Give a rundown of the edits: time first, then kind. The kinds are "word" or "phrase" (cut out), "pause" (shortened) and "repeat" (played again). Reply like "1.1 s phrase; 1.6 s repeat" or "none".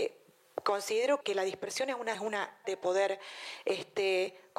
1.2 s word; 2.1 s word; 2.6 s word